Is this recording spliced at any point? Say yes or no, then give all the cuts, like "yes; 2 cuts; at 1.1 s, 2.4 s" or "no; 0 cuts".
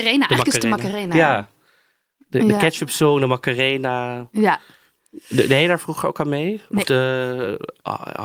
no; 0 cuts